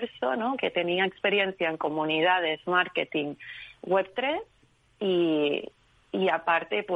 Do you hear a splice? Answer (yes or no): no